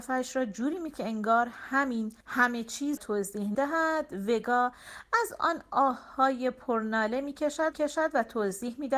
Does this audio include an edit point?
yes; 5 cuts; at 0.9 s, 2.2 s, 3.0 s, 3.5 s, 7.7 s

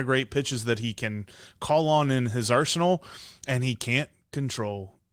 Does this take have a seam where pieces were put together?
no; 0 cuts

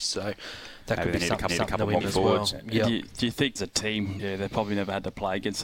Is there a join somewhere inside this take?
yes; 4 cuts; at 1.5 s, 2.0 s, 3.6 s, 4.2 s

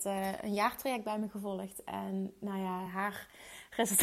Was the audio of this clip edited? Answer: no; 0 cuts

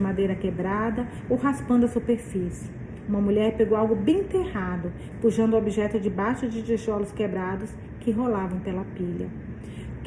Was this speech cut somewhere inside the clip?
no; 0 cuts

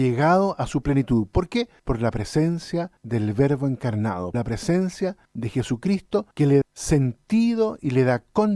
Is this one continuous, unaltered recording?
no; 6 cuts; at 1.8 s, 3.0 s, 4.3 s, 5.2 s, 6.3 s, 6.6 s

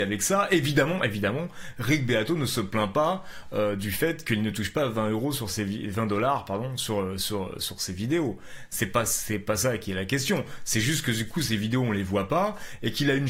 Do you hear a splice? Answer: no; 0 cuts

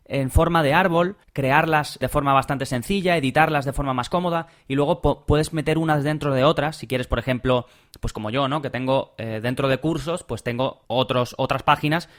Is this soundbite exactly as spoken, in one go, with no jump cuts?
yes; 0 cuts

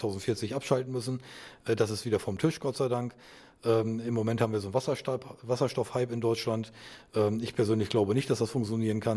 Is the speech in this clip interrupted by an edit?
no; 0 cuts

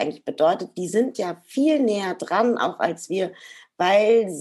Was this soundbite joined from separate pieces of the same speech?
no; 0 cuts

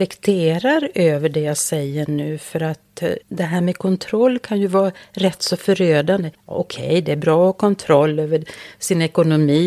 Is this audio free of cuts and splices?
no; 2 cuts; at 3.2 s, 6.3 s

